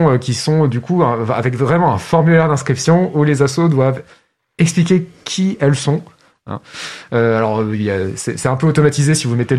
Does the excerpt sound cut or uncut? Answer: uncut